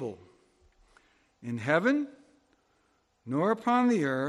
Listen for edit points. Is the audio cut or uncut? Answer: uncut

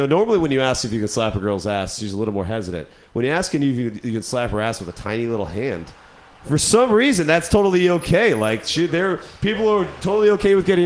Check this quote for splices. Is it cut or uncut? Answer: uncut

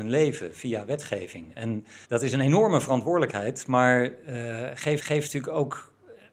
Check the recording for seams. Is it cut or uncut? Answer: cut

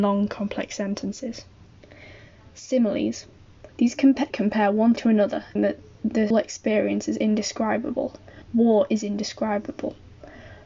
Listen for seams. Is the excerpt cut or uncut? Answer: cut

